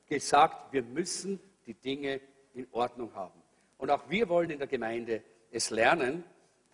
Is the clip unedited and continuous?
yes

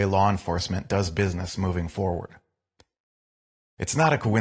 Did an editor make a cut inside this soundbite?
no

